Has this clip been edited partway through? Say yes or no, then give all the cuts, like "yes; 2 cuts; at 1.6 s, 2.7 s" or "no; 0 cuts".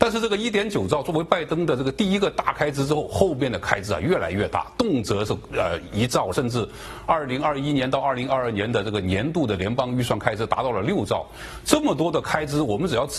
yes; 1 cut; at 6.3 s